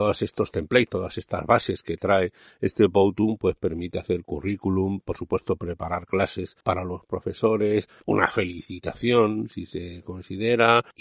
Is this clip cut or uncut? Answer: cut